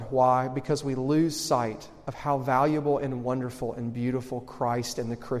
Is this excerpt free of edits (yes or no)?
yes